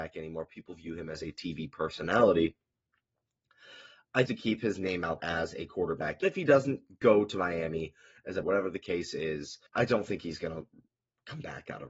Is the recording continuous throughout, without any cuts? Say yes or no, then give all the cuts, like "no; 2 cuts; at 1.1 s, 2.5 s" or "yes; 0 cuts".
no; 5 cuts; at 4.3 s, 5.2 s, 6.2 s, 8.4 s, 9.7 s